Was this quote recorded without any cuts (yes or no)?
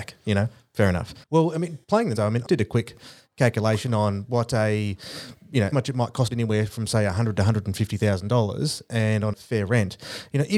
no